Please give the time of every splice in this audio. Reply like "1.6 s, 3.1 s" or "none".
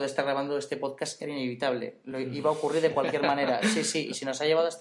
none